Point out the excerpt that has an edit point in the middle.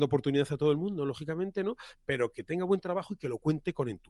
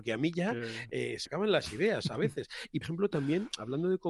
second; 2 cuts; at 1.3 s, 2.8 s

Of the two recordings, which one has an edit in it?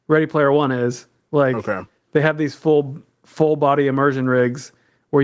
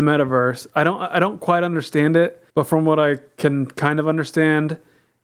second; 1 cut; at 2.5 s

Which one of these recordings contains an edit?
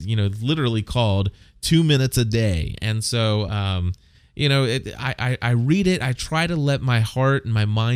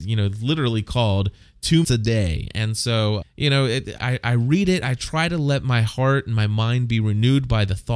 second; 3 cuts; at 1.8 s, 3.2 s, 4.0 s

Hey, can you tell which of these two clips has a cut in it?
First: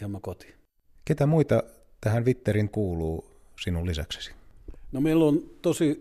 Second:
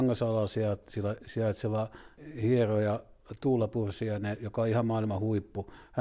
first; 1 cut; at 2.7 s

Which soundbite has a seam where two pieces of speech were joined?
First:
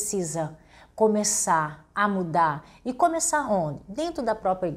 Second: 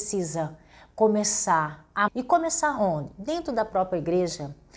second; 1 cut; at 2.1 s

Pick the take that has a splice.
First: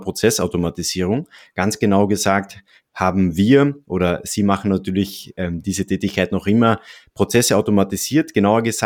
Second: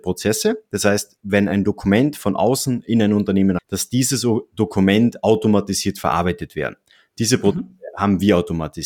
second; 1 cut; at 3.6 s

